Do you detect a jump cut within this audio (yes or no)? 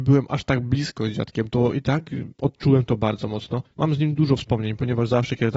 yes